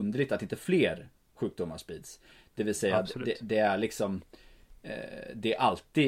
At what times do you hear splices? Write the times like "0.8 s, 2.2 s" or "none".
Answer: none